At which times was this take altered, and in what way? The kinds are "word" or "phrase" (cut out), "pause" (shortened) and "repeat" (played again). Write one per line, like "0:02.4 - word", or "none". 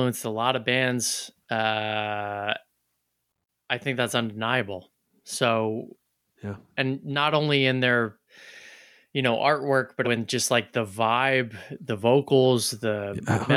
0:01.4 - pause
0:10.0 - word